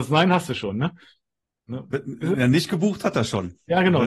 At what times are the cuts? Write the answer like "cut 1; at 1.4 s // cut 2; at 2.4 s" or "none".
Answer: none